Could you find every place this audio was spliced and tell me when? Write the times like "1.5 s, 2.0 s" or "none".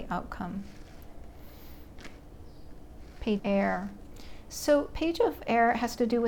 3.4 s

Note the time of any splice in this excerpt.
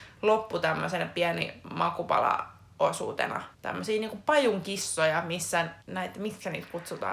3.5 s, 5.8 s

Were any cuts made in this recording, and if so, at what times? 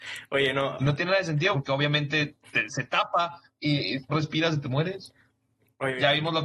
1.5 s, 4.1 s

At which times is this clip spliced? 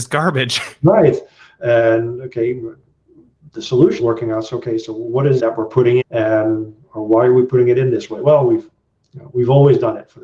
4.0 s, 5.4 s, 6.0 s

